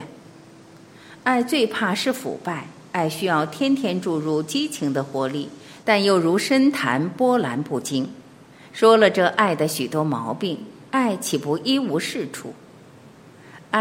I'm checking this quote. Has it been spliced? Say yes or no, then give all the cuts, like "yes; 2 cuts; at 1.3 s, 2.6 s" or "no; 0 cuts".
yes; 1 cut; at 8.5 s